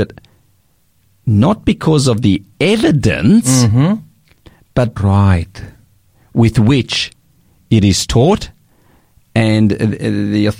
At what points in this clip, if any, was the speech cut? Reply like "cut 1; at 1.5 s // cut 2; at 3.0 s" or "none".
cut 1; at 5.0 s